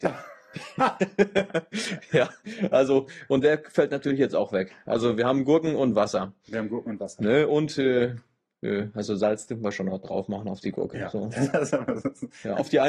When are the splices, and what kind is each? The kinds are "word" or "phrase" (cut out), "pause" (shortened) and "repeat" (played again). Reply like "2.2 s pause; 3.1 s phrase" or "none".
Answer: none